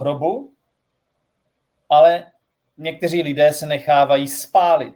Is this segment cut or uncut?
uncut